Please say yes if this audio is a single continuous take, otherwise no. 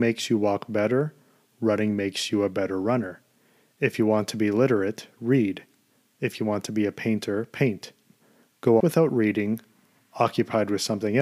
no